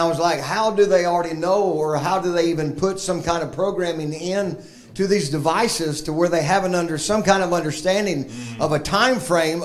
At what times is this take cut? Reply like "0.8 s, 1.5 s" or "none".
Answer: none

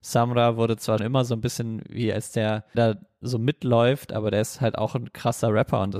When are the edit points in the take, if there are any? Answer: 1.0 s, 2.7 s

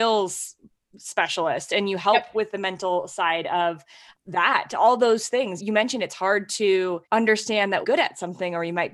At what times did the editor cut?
4.1 s, 5.6 s, 7.0 s, 7.8 s

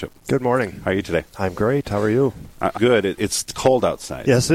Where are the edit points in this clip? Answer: 2.8 s, 3.2 s

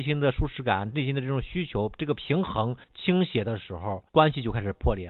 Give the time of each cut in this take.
2.8 s, 4.1 s

